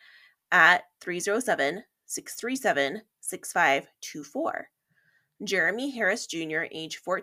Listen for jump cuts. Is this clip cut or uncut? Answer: uncut